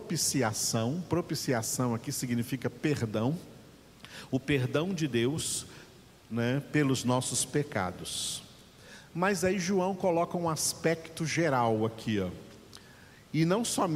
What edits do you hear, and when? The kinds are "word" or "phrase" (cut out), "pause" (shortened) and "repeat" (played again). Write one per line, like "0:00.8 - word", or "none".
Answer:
none